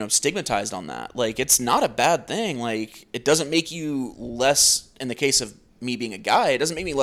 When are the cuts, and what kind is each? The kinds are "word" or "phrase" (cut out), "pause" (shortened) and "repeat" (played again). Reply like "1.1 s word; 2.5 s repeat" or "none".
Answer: 5.7 s pause